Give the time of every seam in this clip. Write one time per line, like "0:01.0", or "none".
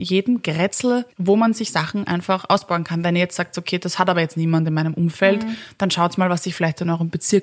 0:01.1

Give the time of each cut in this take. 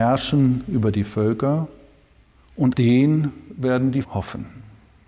0:02.7
0:04.0

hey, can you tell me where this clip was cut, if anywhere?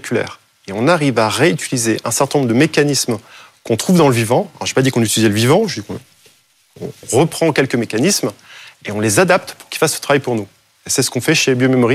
none

